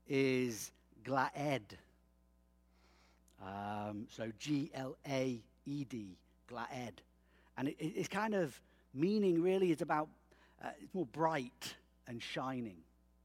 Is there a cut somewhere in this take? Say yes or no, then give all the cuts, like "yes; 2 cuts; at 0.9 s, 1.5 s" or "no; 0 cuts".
no; 0 cuts